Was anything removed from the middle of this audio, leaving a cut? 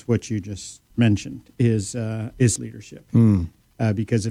yes; 2 cuts; at 0.9 s, 2.6 s

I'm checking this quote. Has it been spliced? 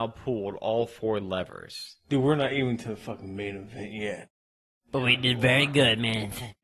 no; 0 cuts

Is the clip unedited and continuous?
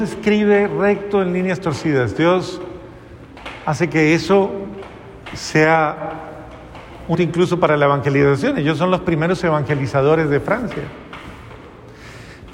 no; 1 cut; at 7.1 s

